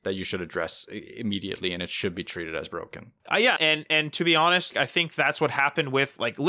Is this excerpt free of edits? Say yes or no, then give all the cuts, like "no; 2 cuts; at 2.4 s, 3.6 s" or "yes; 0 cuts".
no; 3 cuts; at 3.2 s, 3.6 s, 4.7 s